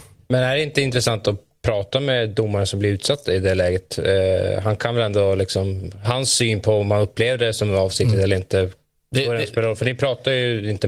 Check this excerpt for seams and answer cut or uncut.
uncut